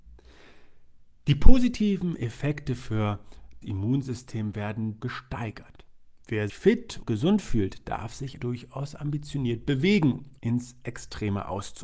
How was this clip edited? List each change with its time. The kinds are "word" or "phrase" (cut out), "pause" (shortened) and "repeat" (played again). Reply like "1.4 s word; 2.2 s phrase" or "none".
3.6 s word; 5.0 s phrase; 6.5 s word; 7.0 s word; 8.4 s word; 10.4 s word